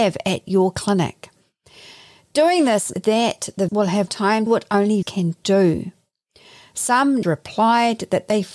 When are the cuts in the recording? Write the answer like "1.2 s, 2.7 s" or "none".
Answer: 2.9 s, 3.7 s, 4.1 s, 4.5 s, 5.0 s, 7.2 s